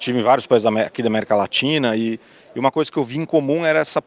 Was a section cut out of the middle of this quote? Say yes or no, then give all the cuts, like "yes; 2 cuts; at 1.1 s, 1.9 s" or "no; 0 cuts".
no; 0 cuts